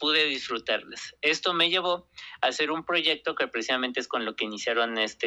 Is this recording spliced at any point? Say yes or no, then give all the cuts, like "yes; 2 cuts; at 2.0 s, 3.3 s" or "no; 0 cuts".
no; 0 cuts